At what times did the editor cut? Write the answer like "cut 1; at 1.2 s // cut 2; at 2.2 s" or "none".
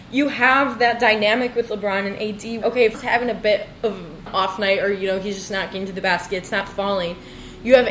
cut 1; at 2.6 s // cut 2; at 2.9 s // cut 3; at 4.3 s